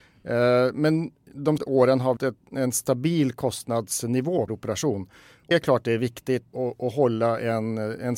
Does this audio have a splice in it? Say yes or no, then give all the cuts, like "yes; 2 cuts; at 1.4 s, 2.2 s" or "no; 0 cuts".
yes; 5 cuts; at 1.6 s, 2.2 s, 4.5 s, 5.5 s, 6.5 s